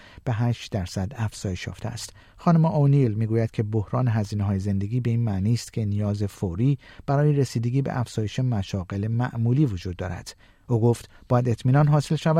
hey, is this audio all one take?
no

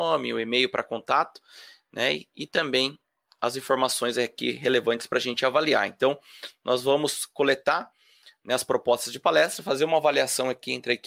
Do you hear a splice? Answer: no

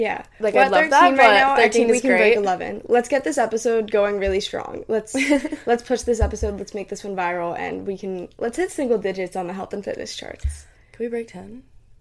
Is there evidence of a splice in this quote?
no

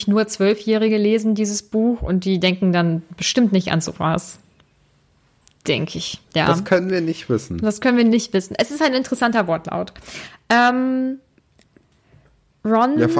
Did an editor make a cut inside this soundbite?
yes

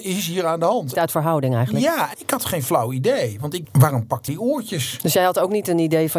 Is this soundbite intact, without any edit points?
no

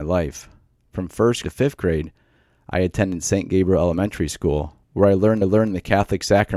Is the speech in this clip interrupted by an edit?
yes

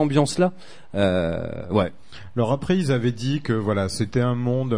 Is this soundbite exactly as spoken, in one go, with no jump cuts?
yes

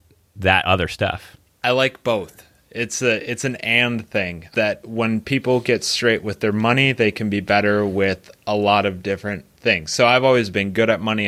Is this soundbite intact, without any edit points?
no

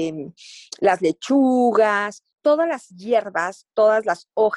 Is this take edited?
yes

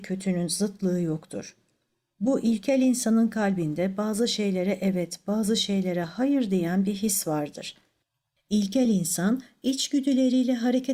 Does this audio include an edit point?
no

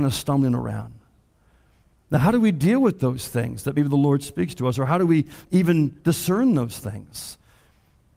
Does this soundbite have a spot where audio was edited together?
no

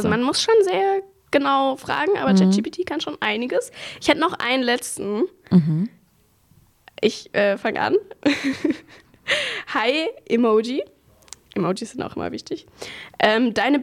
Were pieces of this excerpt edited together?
no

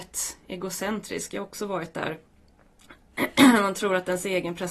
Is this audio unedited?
yes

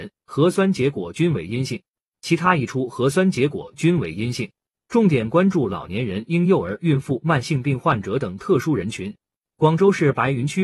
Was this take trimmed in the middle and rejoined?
no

